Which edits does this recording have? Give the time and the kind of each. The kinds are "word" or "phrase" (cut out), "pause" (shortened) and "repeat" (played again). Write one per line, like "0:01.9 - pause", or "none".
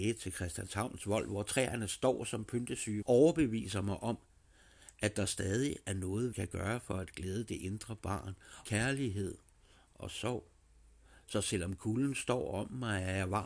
0:03.0 - word
0:06.3 - word
0:08.6 - word